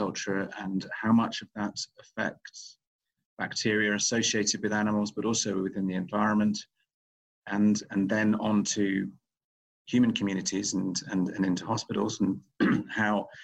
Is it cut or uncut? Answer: uncut